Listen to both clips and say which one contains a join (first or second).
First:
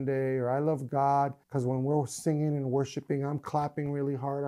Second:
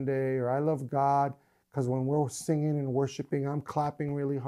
first